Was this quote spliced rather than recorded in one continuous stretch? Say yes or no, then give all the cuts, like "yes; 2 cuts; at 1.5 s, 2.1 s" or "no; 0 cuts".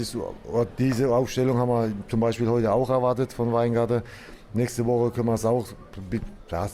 no; 0 cuts